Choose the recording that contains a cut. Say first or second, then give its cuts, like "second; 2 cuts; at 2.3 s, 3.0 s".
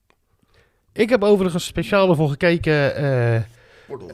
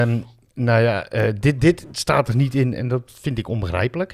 first; 1 cut; at 1.7 s